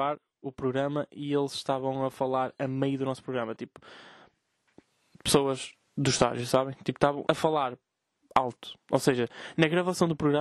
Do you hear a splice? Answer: yes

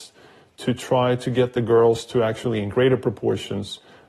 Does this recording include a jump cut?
no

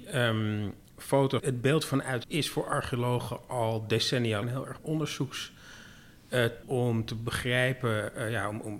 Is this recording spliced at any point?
yes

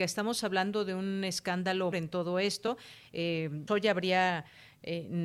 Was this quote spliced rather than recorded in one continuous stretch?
yes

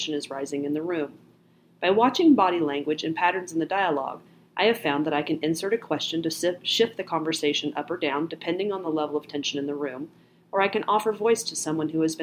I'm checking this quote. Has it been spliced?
no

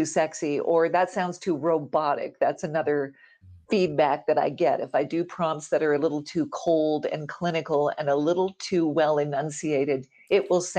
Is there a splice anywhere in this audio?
no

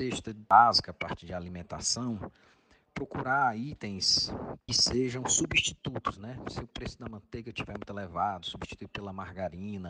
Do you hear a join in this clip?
yes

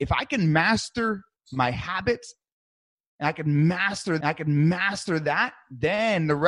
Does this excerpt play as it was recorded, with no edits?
no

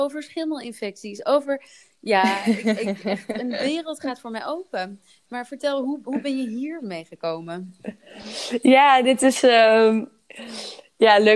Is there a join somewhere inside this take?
no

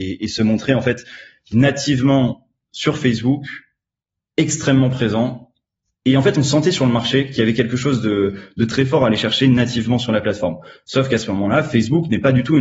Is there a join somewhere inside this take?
no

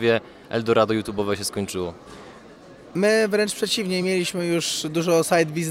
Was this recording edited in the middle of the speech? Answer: no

